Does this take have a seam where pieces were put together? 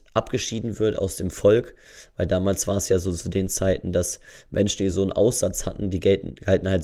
no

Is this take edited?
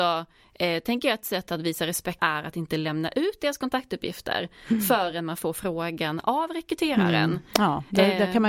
yes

